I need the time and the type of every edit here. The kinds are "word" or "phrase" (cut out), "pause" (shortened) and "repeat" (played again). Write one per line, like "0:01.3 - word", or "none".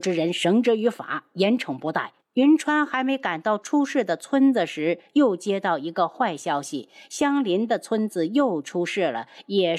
0:02.2 - pause

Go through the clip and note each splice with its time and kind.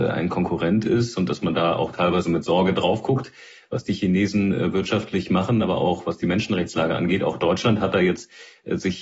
none

